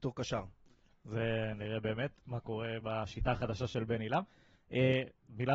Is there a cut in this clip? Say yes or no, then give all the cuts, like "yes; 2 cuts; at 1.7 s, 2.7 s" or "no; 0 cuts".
no; 0 cuts